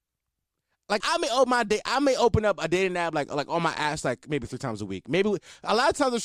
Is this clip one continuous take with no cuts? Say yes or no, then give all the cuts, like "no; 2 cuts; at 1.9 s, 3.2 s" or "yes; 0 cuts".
no; 1 cut; at 1.0 s